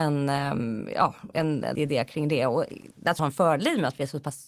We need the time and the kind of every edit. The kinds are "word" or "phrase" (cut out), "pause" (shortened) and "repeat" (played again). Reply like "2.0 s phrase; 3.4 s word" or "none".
1.7 s word; 3.2 s phrase